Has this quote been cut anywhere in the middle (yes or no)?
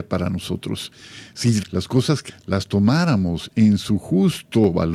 yes